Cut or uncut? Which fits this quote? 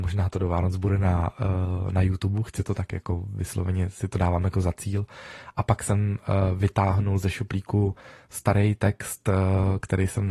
uncut